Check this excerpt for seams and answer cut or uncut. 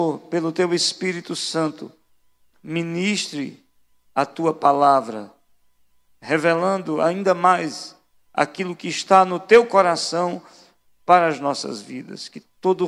uncut